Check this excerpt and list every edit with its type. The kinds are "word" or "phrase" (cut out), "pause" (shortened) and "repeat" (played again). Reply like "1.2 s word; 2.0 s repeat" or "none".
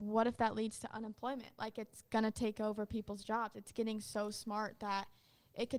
none